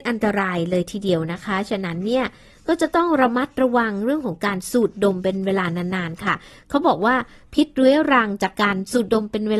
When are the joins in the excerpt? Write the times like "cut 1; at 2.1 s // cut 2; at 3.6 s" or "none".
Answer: none